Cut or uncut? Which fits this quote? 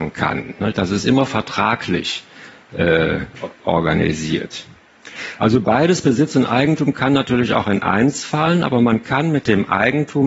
uncut